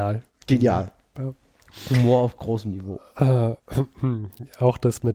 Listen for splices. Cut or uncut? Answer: uncut